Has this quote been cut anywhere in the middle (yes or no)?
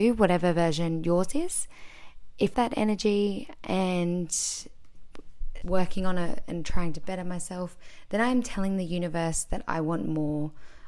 yes